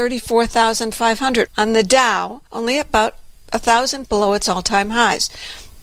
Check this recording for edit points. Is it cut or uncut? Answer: cut